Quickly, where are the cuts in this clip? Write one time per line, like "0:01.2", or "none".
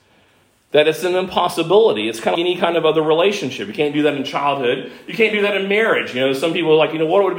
0:02.3